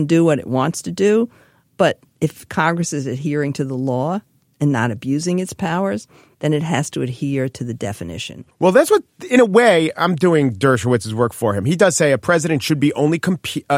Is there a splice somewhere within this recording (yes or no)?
no